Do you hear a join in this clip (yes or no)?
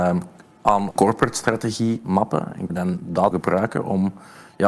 yes